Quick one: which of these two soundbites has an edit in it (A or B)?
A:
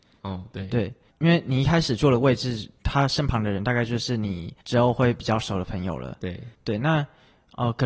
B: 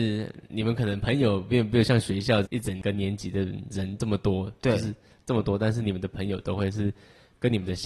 A